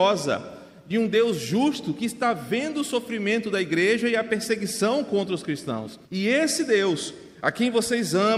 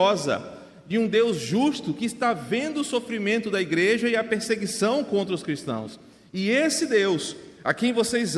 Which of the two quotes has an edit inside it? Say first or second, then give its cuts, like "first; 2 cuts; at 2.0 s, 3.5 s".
first; 1 cut; at 6.1 s